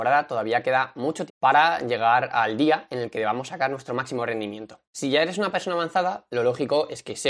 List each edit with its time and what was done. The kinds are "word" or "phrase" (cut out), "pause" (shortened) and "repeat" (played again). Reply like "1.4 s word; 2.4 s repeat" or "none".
1.3 s word; 4.9 s pause